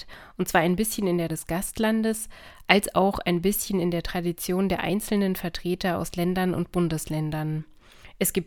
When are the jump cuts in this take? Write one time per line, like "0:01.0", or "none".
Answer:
0:01.3